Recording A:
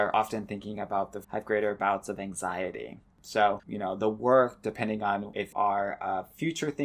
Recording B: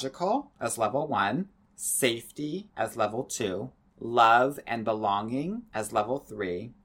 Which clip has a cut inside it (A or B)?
A